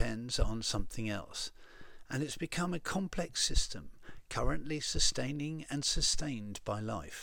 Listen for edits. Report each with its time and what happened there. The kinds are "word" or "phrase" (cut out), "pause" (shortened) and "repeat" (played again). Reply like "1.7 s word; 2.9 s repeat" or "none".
none